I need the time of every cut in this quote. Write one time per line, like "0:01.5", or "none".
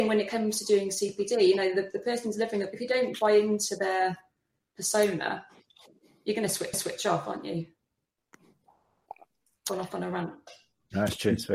0:06.7